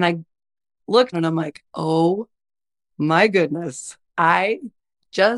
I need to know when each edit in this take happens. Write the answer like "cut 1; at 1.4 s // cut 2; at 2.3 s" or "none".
cut 1; at 1.1 s // cut 2; at 1.7 s // cut 3; at 4.1 s